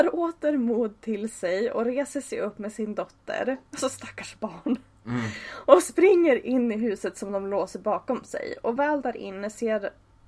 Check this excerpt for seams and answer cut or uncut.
uncut